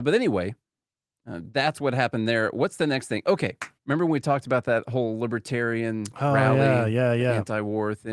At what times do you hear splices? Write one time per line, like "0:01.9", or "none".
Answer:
0:03.8